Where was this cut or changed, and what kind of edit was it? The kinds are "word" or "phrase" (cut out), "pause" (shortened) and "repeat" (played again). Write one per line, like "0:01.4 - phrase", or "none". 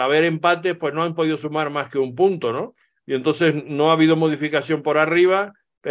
none